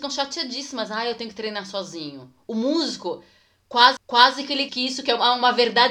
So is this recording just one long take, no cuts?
no; 2 cuts; at 4.0 s, 4.7 s

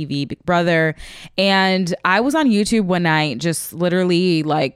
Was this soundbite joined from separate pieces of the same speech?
no; 0 cuts

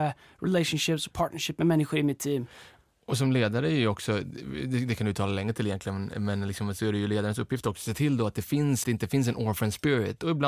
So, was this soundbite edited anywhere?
yes; 1 cut; at 8.8 s

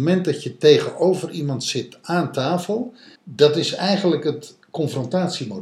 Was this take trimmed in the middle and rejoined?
yes; 1 cut; at 3.2 s

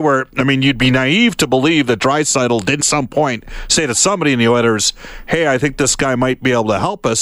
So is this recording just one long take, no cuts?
no; 1 cut; at 2.8 s

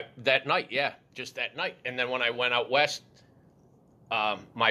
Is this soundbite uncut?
yes; 0 cuts

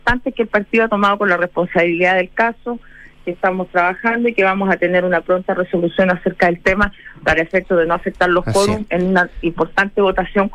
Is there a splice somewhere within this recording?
no; 0 cuts

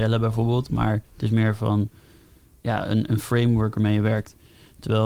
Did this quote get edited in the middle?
yes; 1 cut; at 1.0 s

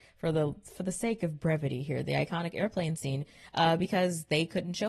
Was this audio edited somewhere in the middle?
no; 0 cuts

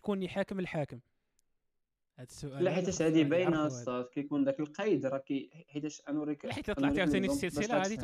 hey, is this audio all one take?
yes; 0 cuts

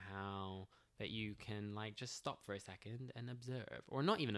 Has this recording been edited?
no; 0 cuts

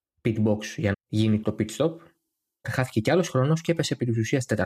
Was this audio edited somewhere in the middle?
yes; 3 cuts; at 0.9 s, 1.4 s, 2.6 s

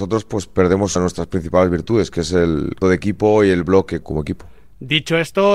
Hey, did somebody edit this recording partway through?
yes; 3 cuts; at 1.0 s, 2.8 s, 4.0 s

